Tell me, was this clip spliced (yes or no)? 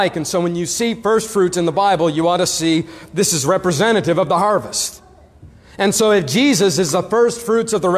no